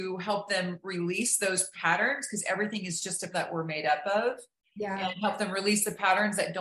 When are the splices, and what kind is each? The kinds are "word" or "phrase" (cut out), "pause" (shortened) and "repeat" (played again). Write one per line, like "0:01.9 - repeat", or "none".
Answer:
0:03.3 - word